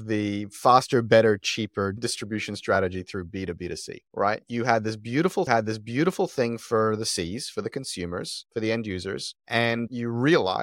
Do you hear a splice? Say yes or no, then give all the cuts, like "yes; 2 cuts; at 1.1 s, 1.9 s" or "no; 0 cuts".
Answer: yes; 2 cuts; at 5.5 s, 9.4 s